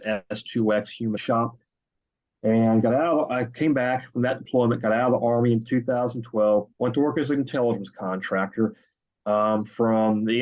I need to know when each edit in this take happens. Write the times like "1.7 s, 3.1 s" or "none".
1.2 s, 6.7 s